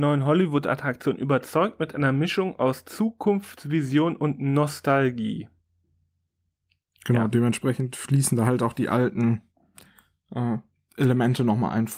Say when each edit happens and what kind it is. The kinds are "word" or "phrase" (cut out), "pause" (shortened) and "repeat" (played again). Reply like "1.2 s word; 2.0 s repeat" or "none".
none